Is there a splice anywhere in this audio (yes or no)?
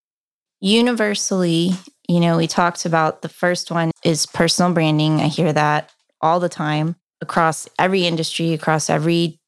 yes